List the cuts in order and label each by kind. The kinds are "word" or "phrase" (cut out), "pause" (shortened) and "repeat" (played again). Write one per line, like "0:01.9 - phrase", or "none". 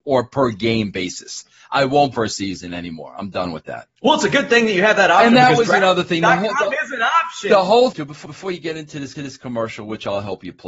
0:02.2 - phrase
0:04.0 - pause
0:07.9 - phrase
0:08.3 - repeat
0:09.1 - repeat